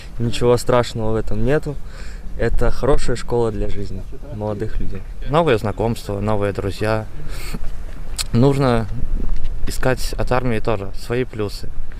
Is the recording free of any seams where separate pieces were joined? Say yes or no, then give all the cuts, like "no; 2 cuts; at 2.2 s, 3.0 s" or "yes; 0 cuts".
yes; 0 cuts